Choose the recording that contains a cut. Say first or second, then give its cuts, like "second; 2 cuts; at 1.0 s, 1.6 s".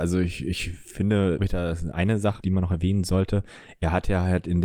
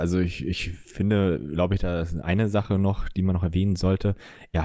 first; 2 cuts; at 1.4 s, 2.4 s